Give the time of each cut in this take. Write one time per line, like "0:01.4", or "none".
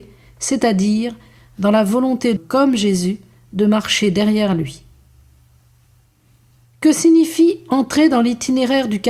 0:02.4